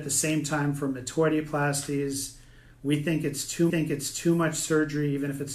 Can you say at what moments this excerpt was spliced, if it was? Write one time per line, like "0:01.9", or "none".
0:03.7